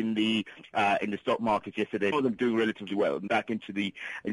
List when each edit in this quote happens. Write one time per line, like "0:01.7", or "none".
0:02.1
0:03.3